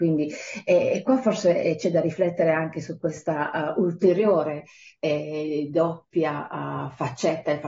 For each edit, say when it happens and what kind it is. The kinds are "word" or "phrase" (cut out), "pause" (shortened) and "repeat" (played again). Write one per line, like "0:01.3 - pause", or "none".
none